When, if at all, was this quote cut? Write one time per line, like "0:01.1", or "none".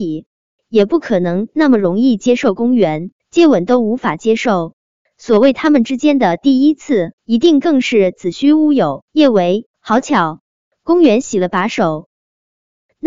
0:03.2
0:07.2
0:09.1
0:09.7